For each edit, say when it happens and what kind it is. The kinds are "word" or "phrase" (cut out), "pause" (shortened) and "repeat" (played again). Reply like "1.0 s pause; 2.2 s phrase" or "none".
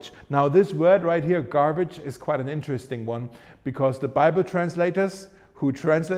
none